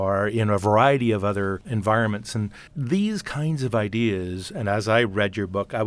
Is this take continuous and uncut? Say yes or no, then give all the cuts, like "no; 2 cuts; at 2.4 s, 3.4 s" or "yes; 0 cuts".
no; 1 cut; at 2.7 s